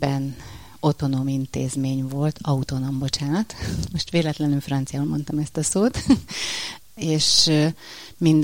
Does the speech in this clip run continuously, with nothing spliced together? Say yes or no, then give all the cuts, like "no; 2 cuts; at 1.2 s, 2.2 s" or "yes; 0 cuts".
yes; 0 cuts